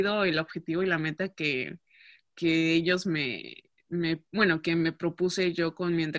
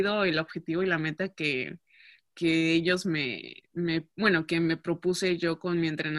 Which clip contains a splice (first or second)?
second